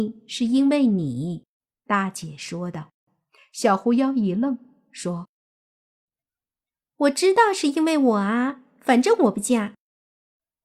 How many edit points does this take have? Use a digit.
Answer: 1